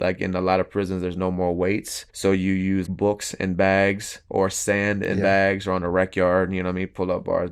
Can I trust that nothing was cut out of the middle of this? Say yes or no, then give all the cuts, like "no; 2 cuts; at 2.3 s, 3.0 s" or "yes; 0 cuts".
no; 2 cuts; at 2.1 s, 2.9 s